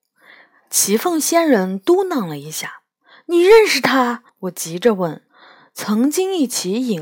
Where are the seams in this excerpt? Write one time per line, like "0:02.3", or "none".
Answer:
0:04.3
0:05.3